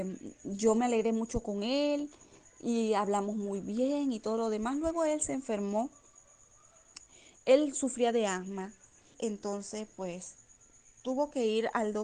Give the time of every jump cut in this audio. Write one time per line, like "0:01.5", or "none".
0:09.1